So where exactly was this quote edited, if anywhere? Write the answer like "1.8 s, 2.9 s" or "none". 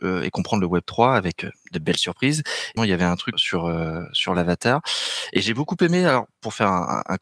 2.8 s, 3.3 s